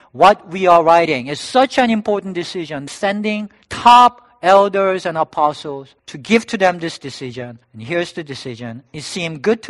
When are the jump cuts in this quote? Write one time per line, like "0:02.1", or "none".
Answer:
0:02.9
0:03.6
0:06.0
0:07.6

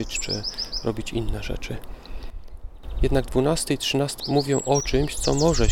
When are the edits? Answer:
0:04.2

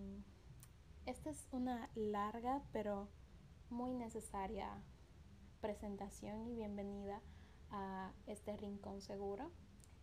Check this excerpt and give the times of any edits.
none

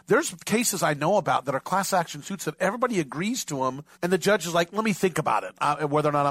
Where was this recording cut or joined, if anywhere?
0:03.9

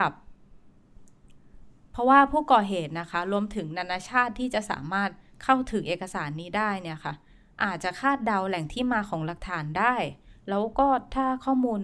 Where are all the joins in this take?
none

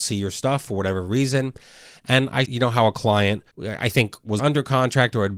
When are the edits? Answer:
0:02.4
0:03.5
0:04.4

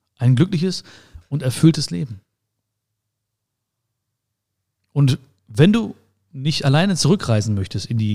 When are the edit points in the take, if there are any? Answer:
none

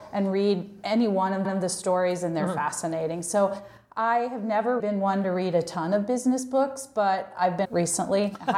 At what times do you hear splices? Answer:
0:01.4
0:04.8
0:07.6

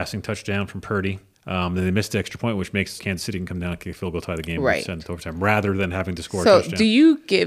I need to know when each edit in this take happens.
0:01.3
0:03.0

